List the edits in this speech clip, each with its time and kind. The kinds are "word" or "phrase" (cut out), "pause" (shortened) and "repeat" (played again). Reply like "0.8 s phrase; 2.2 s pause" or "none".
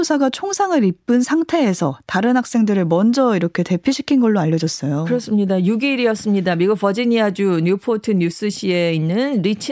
none